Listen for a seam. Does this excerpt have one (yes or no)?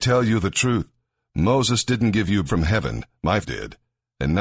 yes